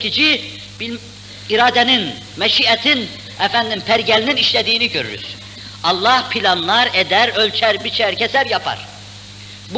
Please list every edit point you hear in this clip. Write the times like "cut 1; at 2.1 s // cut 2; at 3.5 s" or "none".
none